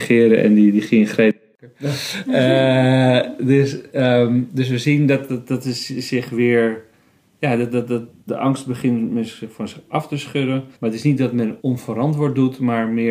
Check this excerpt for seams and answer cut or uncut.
cut